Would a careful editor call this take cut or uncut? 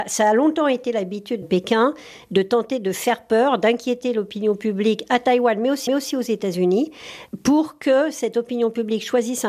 cut